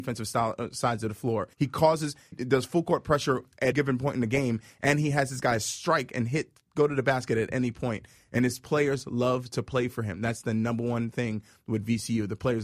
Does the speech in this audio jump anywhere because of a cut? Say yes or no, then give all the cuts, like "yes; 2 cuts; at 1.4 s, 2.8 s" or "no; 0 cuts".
yes; 3 cuts; at 1.5 s, 2.3 s, 3.7 s